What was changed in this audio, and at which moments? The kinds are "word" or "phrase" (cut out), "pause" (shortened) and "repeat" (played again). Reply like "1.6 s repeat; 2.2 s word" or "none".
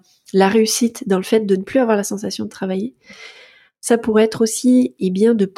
none

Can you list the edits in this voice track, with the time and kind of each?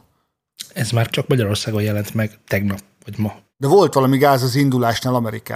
1.1 s phrase

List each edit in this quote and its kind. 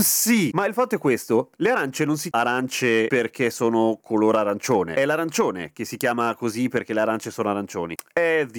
2.3 s word

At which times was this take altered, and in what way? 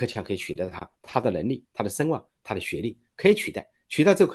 1.0 s pause

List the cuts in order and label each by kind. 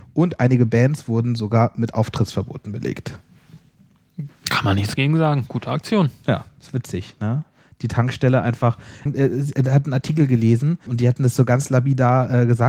9.1 s word; 10.9 s word

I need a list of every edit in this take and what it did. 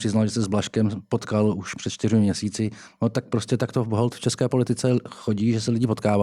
none

